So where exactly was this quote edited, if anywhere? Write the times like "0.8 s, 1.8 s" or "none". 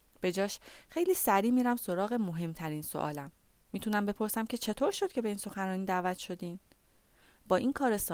none